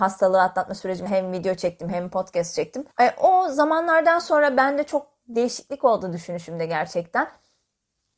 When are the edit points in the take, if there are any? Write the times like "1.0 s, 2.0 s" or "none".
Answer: 1.1 s, 2.9 s